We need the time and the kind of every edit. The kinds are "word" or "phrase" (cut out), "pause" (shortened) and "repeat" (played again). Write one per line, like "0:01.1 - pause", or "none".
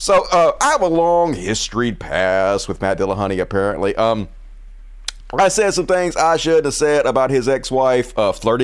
none